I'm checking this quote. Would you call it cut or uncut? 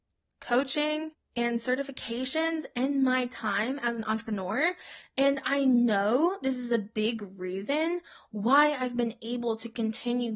uncut